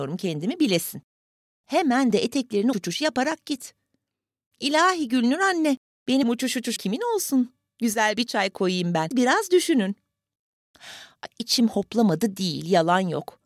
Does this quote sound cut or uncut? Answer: cut